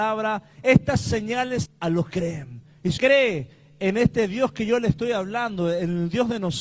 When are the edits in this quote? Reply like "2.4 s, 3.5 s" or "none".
1.6 s, 2.1 s, 3.0 s